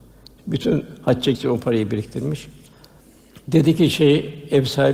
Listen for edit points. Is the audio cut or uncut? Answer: cut